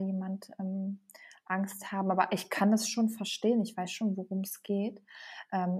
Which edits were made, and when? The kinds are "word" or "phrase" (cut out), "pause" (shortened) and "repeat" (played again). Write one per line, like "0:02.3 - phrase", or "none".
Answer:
none